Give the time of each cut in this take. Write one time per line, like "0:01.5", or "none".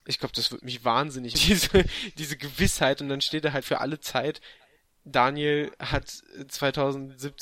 0:01.3
0:03.6